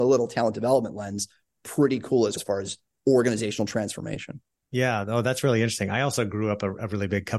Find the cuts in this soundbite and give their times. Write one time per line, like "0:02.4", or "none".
0:02.4